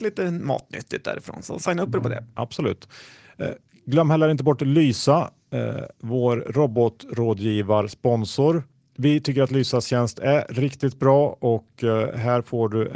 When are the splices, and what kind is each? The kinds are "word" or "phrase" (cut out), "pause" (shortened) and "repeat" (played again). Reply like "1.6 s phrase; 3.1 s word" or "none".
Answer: none